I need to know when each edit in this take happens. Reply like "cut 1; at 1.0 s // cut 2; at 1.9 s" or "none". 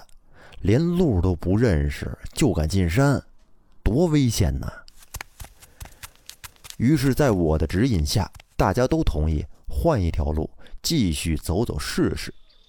cut 1; at 8.5 s